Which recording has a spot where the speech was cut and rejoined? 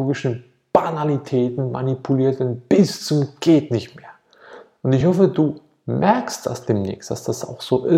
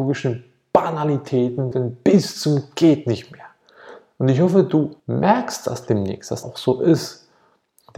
second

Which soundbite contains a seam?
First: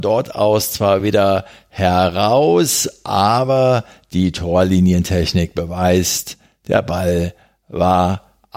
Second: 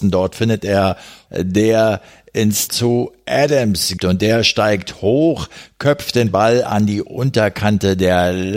second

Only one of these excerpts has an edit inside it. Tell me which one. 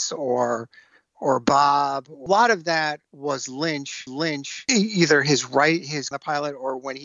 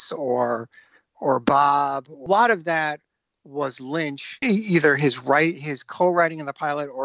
first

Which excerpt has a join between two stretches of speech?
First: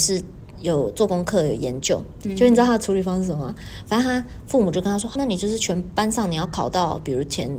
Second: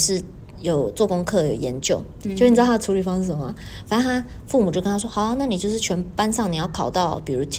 first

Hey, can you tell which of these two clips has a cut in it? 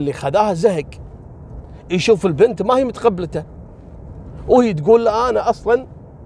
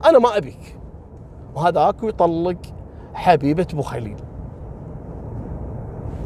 second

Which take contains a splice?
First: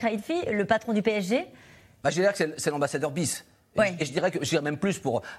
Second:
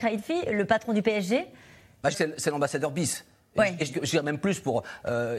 second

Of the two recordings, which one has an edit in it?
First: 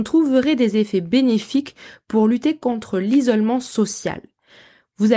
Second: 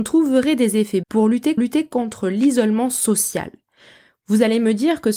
second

